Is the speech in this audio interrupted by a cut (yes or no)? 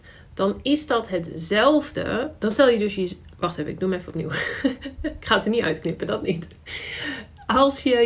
yes